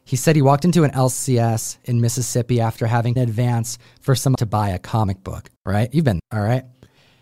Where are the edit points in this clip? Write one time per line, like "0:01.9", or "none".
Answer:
0:03.2
0:04.3
0:05.6
0:06.2